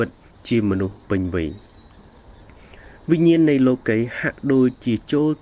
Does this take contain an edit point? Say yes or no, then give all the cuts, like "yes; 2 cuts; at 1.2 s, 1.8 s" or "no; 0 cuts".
yes; 1 cut; at 1.0 s